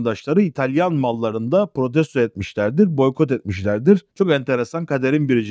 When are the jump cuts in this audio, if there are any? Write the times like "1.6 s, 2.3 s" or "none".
none